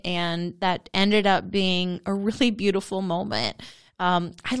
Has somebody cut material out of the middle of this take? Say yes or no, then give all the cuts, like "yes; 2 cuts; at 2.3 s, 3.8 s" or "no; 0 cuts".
no; 0 cuts